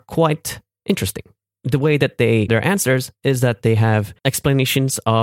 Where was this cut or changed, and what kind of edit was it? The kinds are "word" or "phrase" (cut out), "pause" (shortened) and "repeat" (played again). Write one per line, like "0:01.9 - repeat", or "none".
0:02.5 - word
0:04.2 - pause